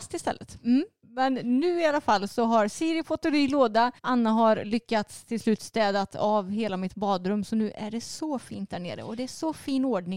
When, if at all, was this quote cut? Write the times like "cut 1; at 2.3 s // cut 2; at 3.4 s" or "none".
cut 1; at 4.0 s